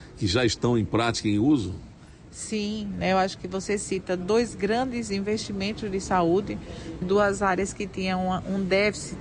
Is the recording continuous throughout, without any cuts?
no; 1 cut; at 7.0 s

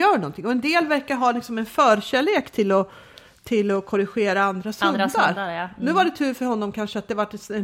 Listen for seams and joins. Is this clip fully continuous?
yes; 0 cuts

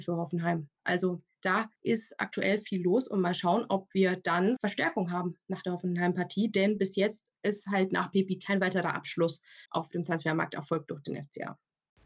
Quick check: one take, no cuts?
no; 4 cuts; at 1.8 s, 4.6 s, 7.4 s, 9.7 s

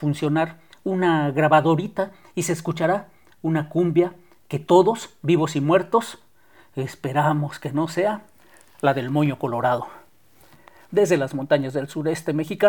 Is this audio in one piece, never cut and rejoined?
yes; 0 cuts

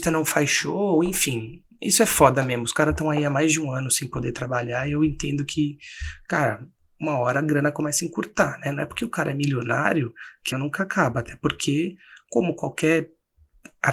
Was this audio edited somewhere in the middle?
yes; 1 cut; at 10.5 s

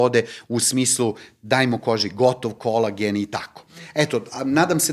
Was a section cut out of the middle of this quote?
no; 0 cuts

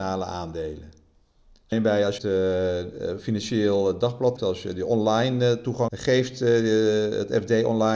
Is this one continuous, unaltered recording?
no; 4 cuts; at 1.7 s, 2.2 s, 4.4 s, 5.9 s

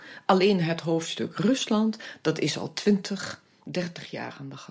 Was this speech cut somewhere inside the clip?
no; 0 cuts

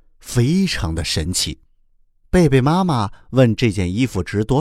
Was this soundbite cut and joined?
yes; 1 cut; at 1.7 s

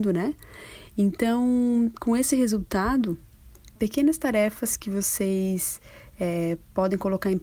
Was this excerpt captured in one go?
no; 1 cut; at 3.8 s

